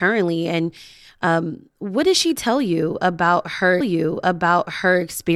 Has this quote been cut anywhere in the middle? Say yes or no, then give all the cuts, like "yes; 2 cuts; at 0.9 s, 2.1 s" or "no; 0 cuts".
yes; 1 cut; at 3.8 s